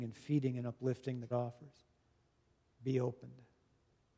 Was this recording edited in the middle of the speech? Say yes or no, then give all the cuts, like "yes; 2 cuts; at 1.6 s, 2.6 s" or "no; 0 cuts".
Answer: yes; 2 cuts; at 1.3 s, 2.4 s